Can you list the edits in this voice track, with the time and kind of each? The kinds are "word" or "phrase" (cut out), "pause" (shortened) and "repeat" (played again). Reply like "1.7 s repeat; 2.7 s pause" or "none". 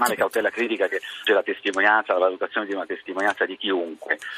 1.3 s word